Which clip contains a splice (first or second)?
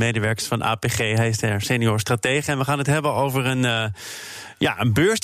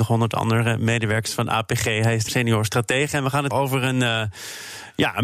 second